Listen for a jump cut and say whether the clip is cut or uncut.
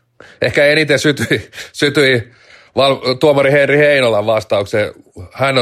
uncut